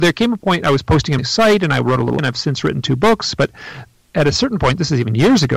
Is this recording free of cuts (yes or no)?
no